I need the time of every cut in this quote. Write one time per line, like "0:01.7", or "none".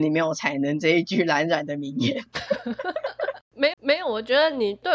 0:03.7